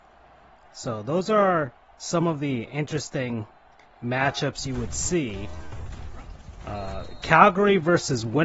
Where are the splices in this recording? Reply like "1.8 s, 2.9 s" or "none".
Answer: none